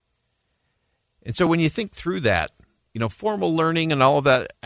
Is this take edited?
no; 0 cuts

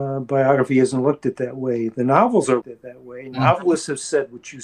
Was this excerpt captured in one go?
no; 1 cut; at 2.6 s

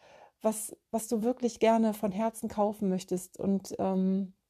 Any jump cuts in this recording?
no; 0 cuts

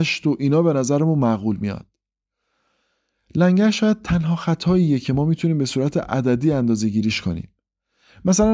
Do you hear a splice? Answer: no; 0 cuts

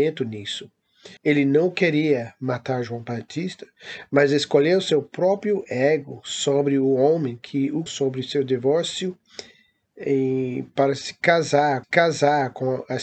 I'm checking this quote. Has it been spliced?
yes; 3 cuts; at 1.2 s, 7.9 s, 11.8 s

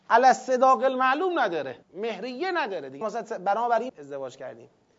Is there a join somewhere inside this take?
yes; 3 cuts; at 1.8 s, 3.0 s, 3.9 s

